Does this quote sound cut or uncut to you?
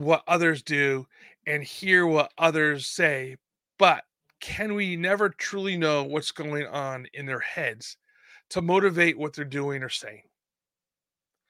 uncut